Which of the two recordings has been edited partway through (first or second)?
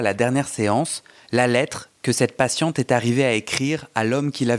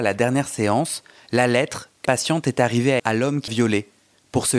second